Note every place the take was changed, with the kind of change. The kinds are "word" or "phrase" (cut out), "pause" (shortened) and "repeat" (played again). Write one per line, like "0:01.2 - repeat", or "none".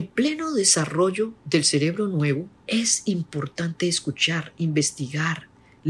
0:02.5 - pause